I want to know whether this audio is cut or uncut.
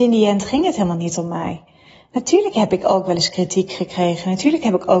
uncut